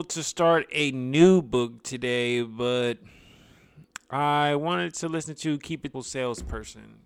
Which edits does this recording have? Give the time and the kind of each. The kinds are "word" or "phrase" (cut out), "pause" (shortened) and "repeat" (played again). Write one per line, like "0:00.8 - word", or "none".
0:05.9 - word